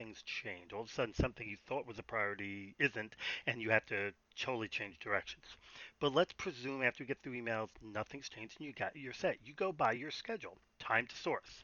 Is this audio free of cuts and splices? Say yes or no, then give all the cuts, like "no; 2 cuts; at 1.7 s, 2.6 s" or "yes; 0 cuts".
yes; 0 cuts